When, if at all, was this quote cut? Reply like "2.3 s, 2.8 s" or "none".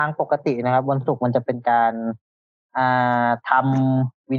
none